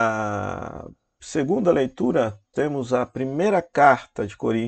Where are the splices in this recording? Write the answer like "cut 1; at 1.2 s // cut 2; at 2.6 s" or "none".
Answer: cut 1; at 2.5 s